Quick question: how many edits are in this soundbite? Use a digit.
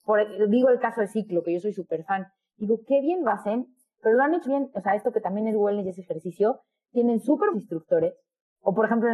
2